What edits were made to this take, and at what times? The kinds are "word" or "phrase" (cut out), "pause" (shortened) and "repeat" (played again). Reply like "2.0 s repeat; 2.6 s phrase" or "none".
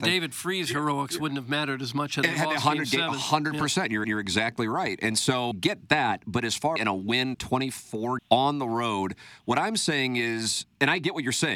4.0 s repeat; 5.5 s phrase; 6.8 s phrase; 7.3 s phrase; 8.2 s phrase